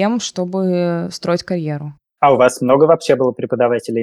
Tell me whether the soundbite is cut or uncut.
uncut